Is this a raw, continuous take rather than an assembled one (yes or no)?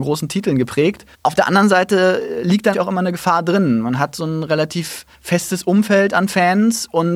no